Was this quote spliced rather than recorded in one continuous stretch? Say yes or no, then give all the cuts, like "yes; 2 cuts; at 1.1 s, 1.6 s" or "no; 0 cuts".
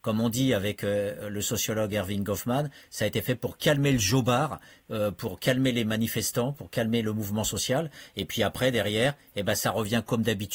no; 0 cuts